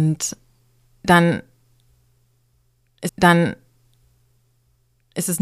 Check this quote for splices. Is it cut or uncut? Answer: cut